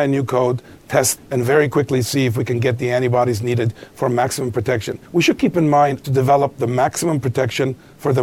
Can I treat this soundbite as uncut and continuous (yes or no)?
no